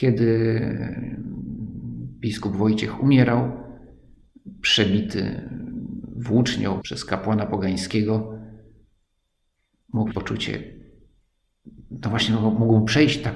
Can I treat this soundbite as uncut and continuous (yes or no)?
no